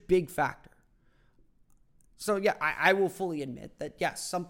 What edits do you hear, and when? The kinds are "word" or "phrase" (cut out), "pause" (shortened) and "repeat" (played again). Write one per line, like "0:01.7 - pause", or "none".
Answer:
none

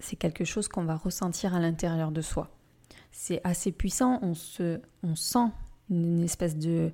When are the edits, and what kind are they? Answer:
none

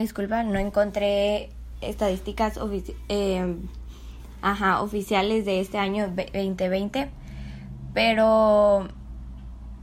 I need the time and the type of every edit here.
none

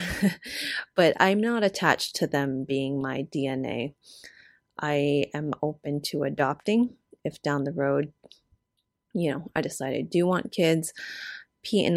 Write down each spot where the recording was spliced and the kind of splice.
none

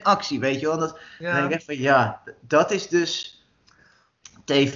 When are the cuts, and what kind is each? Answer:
none

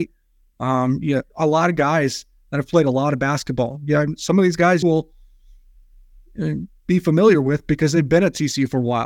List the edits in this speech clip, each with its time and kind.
0:01.3 - pause
0:04.8 - word

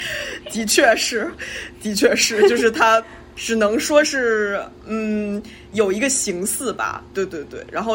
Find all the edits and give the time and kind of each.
none

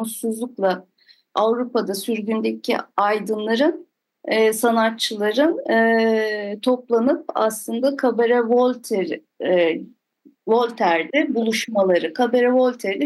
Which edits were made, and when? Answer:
none

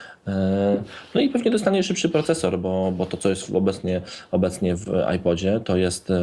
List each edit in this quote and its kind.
none

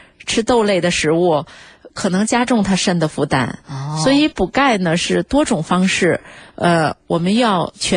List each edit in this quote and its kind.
none

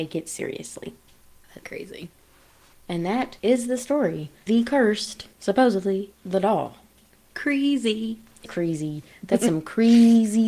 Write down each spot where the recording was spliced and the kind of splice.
0:01.6 - word
0:04.5 - word
0:06.1 - word
0:08.5 - word

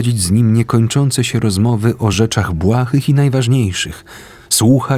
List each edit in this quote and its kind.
none

